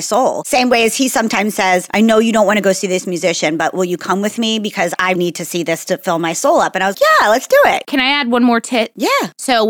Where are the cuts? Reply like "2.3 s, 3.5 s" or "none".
5.2 s, 6.9 s